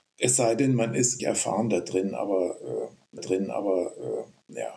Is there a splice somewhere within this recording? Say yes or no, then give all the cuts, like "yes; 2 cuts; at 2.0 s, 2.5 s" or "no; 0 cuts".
yes; 2 cuts; at 1.2 s, 3.2 s